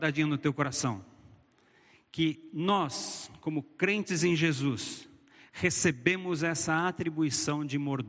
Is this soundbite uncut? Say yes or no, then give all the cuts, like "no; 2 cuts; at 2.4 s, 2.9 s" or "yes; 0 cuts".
yes; 0 cuts